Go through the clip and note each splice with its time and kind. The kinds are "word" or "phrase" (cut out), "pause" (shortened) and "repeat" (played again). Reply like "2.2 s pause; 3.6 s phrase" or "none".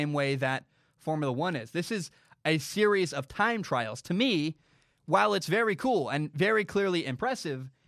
none